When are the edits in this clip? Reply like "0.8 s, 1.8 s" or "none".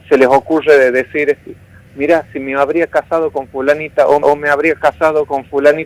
1.9 s, 4.2 s